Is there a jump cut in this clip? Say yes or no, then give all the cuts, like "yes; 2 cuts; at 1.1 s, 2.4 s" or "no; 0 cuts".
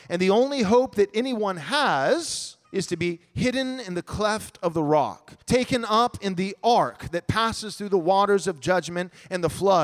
yes; 2 cuts; at 2.6 s, 5.4 s